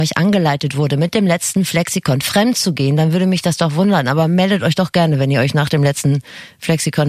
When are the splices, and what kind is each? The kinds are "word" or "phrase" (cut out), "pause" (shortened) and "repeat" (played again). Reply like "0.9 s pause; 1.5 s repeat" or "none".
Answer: none